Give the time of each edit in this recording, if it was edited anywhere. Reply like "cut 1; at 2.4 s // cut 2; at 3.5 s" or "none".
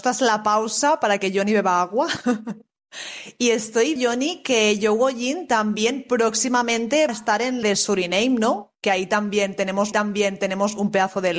cut 1; at 4.0 s // cut 2; at 7.1 s // cut 3; at 7.6 s // cut 4; at 9.9 s